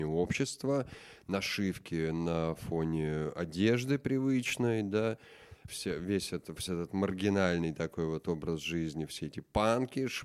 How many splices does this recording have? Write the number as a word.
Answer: two